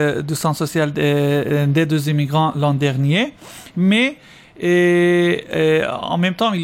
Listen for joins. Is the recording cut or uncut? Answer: uncut